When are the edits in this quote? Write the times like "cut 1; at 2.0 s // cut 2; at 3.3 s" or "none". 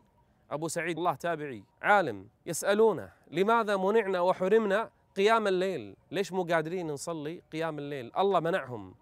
cut 1; at 1.0 s // cut 2; at 1.7 s // cut 3; at 6.0 s

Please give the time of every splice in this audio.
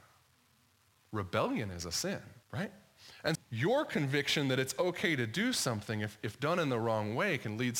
cut 1; at 2.4 s // cut 2; at 3.4 s

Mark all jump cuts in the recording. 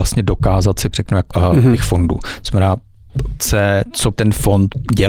cut 1; at 0.9 s // cut 2; at 1.3 s // cut 3; at 3.4 s // cut 4; at 4.1 s

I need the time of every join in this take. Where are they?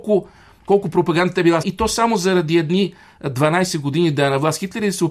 cut 1; at 1.6 s

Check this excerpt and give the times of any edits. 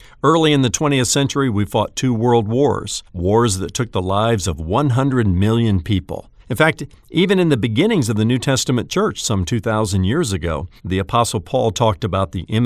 cut 1; at 3.1 s // cut 2; at 6.4 s // cut 3; at 10.8 s

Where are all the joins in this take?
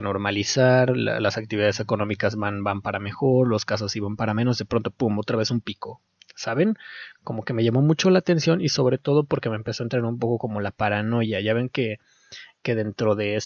none

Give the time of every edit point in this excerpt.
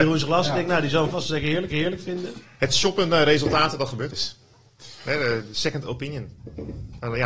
cut 1; at 1.7 s // cut 2; at 4.1 s

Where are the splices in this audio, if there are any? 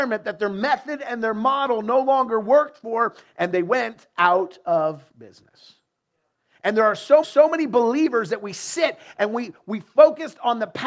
cut 1; at 5.1 s // cut 2; at 7.2 s

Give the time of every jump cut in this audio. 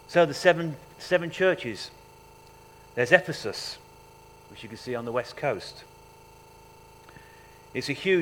none

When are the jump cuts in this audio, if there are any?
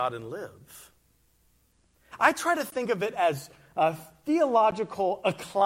none

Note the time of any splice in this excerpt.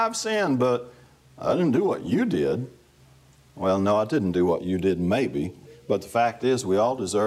none

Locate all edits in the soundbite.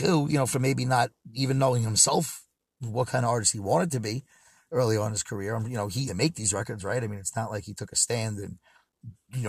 cut 1; at 6.1 s

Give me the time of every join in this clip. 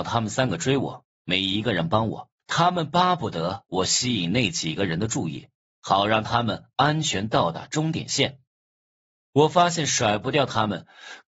cut 1; at 2.4 s

